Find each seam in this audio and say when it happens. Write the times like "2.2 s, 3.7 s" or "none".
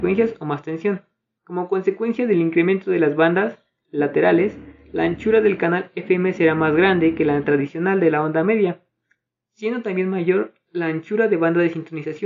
none